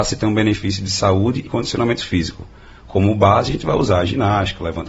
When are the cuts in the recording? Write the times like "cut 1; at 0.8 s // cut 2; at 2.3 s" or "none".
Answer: cut 1; at 1.5 s